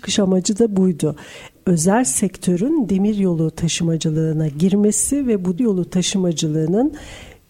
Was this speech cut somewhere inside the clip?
yes; 1 cut; at 5.6 s

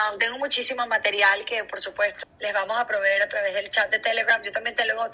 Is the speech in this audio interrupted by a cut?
yes; 1 cut; at 2.2 s

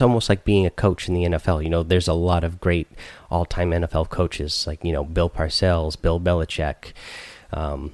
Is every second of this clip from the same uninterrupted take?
yes; 0 cuts

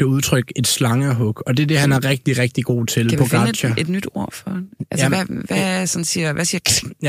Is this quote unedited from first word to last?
yes; 0 cuts

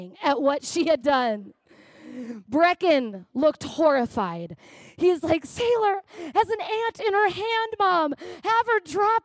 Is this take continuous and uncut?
no; 1 cut; at 1.0 s

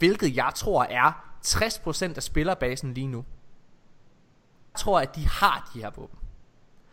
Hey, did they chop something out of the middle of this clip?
yes; 1 cut; at 4.7 s

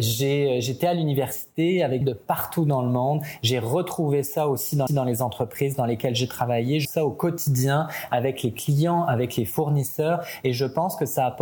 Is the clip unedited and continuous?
no; 3 cuts; at 2.0 s, 4.9 s, 6.8 s

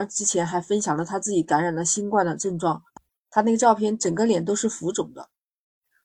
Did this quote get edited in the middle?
no; 0 cuts

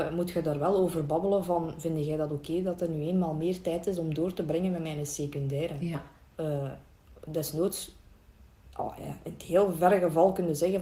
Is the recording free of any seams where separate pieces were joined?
yes; 0 cuts

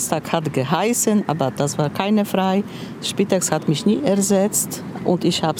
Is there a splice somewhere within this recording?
no; 0 cuts

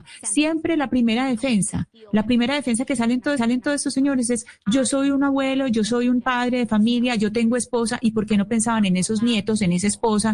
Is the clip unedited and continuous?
no; 1 cut; at 3.4 s

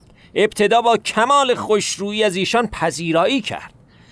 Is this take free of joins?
yes; 0 cuts

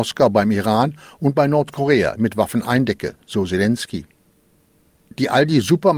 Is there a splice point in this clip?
no; 0 cuts

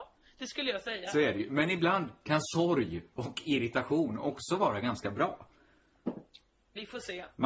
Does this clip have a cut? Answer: no; 0 cuts

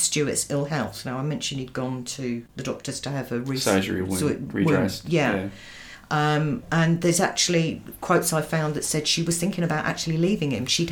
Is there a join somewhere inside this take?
yes; 1 cut; at 2.5 s

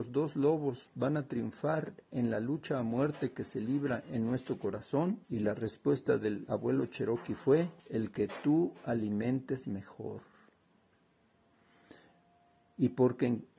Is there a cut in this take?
yes; 2 cuts; at 5.2 s, 7.8 s

